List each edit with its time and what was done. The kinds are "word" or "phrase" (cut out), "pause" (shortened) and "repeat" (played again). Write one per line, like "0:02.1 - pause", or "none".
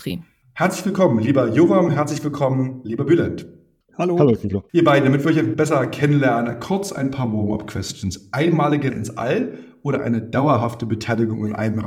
0:05.5 - word
0:08.9 - word